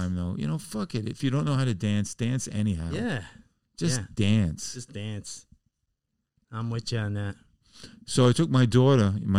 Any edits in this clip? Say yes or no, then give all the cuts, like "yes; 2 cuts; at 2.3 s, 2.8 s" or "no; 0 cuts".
no; 0 cuts